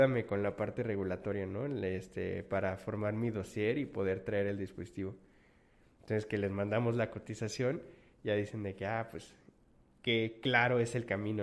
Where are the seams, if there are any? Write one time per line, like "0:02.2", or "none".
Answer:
none